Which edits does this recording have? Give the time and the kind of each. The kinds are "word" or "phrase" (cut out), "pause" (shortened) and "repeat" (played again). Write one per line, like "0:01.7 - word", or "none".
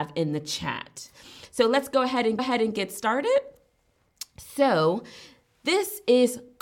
0:02.4 - repeat